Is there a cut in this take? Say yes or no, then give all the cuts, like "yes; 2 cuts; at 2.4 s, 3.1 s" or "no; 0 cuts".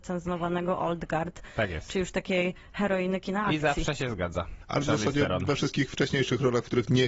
no; 0 cuts